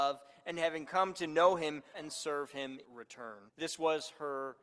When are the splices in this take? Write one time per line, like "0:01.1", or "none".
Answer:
0:01.9
0:02.8
0:03.5